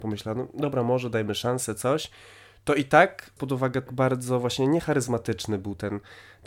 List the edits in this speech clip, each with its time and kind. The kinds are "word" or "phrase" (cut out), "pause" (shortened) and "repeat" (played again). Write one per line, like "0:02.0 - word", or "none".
0:03.4 - word
0:03.9 - word

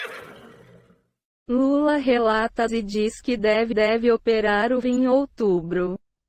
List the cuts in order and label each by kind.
0:02.7 - word
0:03.7 - repeat
0:04.8 - word

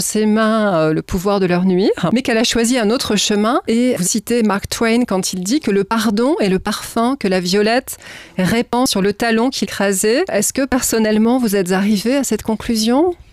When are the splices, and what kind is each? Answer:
0:04.0 - word
0:09.6 - word

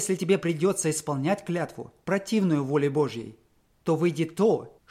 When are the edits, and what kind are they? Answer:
none

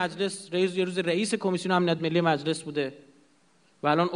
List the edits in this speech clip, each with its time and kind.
none

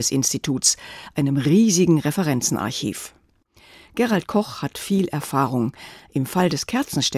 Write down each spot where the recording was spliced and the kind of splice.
none

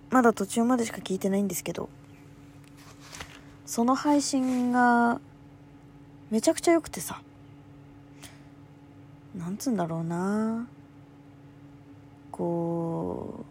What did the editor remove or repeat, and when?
none

